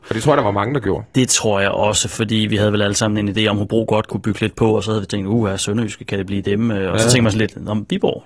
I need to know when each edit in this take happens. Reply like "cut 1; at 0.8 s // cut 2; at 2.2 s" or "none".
cut 1; at 4.1 s